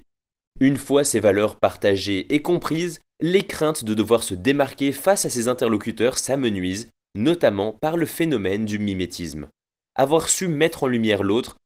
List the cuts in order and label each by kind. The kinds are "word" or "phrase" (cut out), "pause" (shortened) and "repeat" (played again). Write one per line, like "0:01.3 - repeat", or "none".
none